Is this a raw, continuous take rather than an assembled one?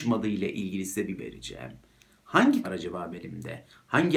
no; 3 cuts; at 1.2 s, 2.6 s, 3.1 s

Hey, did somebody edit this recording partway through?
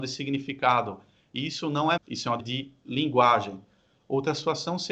yes; 2 cuts; at 2.0 s, 2.4 s

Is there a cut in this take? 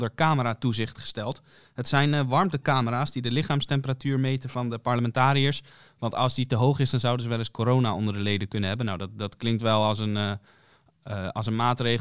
no; 0 cuts

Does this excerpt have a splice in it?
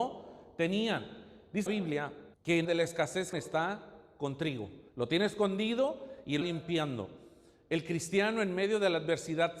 yes; 6 cuts; at 1.7 s, 2.3 s, 2.6 s, 3.3 s, 4.9 s, 6.4 s

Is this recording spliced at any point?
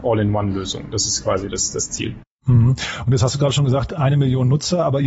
no; 0 cuts

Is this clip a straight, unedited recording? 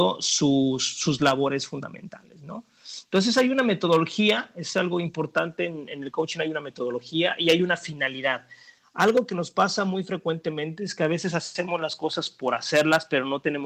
yes; 0 cuts

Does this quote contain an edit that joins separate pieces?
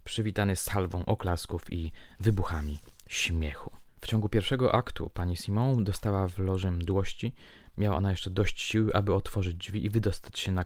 no; 0 cuts

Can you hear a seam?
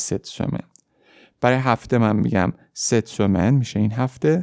no; 0 cuts

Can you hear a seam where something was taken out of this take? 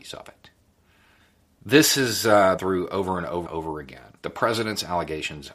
yes; 4 cuts; at 1.2 s, 2.6 s, 3.5 s, 4.2 s

